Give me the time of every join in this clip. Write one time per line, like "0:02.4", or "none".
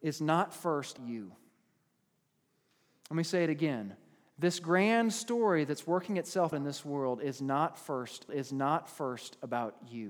0:01.0
0:06.5
0:08.3